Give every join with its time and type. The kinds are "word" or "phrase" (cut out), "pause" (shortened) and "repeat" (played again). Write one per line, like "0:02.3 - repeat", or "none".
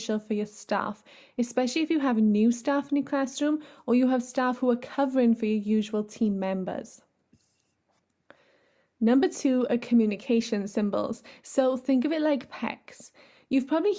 none